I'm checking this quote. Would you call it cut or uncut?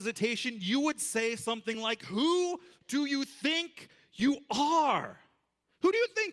uncut